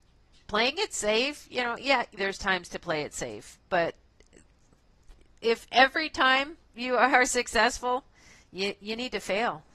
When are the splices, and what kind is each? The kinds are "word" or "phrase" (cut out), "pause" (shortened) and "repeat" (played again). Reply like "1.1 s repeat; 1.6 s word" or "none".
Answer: 2.2 s word